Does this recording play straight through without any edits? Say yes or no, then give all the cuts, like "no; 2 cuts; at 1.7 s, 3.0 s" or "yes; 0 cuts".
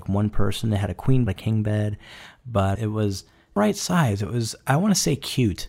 no; 3 cuts; at 1.3 s, 2.8 s, 3.6 s